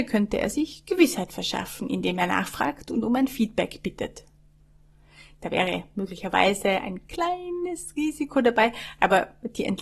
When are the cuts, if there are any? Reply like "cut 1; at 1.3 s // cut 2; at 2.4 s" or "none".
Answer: none